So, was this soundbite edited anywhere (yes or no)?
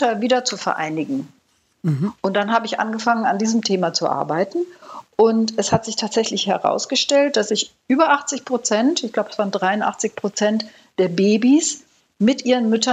no